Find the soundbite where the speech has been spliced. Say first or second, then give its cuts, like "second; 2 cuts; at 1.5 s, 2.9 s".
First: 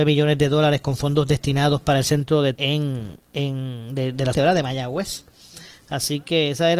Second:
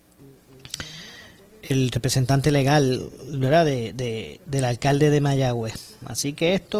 first; 3 cuts; at 2.5 s, 3.2 s, 4.3 s